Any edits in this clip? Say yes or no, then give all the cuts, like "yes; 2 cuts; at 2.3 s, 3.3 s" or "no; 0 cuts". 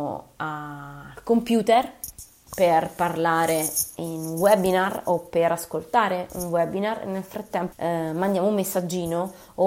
yes; 1 cut; at 7.7 s